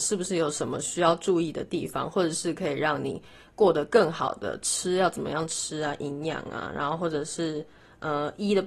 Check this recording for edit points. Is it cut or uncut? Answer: uncut